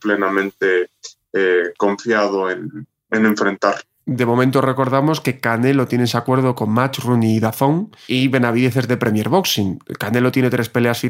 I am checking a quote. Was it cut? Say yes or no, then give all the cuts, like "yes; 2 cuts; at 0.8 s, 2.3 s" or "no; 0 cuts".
yes; 2 cuts; at 3.1 s, 8.1 s